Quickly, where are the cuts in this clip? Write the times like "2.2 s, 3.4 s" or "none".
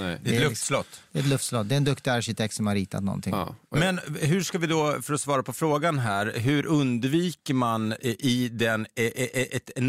none